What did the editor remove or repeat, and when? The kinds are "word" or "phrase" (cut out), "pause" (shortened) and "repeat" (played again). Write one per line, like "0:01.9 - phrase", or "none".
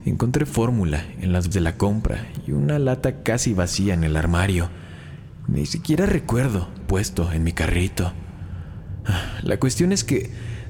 0:01.5 - word
0:06.8 - word